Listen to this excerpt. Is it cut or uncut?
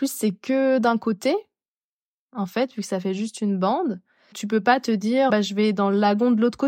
cut